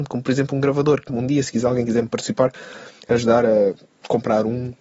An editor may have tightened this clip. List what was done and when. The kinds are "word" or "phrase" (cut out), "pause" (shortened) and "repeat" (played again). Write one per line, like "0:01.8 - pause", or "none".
0:01.1 - word